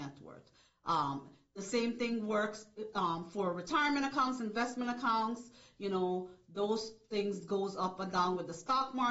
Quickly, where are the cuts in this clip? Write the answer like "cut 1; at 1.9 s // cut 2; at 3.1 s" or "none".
none